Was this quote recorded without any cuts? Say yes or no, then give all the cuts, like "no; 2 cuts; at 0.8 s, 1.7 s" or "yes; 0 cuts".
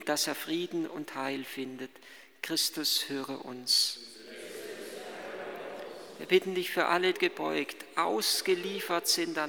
no; 1 cut; at 7.1 s